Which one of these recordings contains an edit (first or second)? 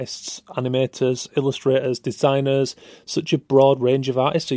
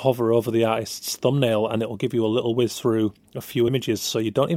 second